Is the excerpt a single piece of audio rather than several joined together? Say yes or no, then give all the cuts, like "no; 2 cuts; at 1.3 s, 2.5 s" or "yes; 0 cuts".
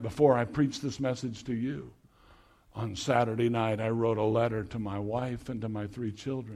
yes; 0 cuts